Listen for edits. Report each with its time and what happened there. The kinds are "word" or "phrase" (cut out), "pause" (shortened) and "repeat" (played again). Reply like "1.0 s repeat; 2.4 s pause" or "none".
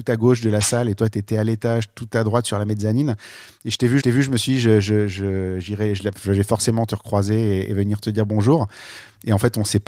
4.0 s repeat